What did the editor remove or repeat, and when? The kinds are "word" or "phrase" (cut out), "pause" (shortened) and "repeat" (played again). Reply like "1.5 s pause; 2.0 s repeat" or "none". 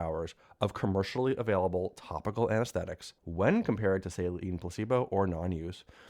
3.2 s pause